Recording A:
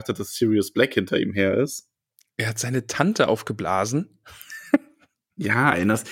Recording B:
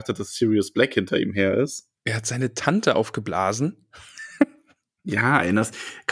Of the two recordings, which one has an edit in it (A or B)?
B